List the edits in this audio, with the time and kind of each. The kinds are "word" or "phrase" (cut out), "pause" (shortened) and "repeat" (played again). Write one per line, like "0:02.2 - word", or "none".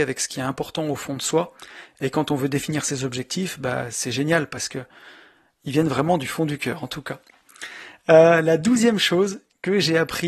none